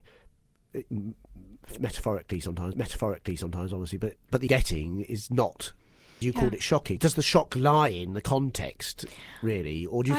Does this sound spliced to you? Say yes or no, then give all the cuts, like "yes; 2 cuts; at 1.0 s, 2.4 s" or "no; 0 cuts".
yes; 5 cuts; at 2.7 s, 4.2 s, 4.5 s, 6.2 s, 7.0 s